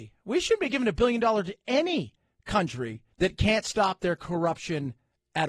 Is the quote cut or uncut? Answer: cut